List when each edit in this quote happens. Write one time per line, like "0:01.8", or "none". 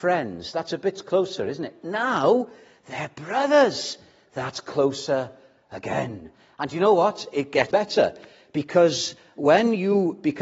0:07.7